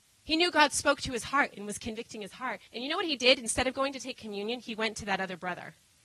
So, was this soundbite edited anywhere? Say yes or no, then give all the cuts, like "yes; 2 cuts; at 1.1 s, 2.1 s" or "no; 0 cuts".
yes; 1 cut; at 2.7 s